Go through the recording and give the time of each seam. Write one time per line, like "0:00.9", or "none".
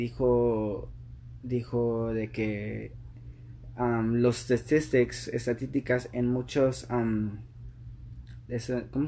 none